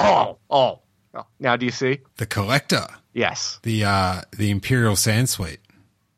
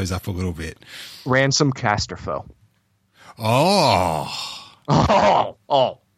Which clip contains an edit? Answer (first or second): first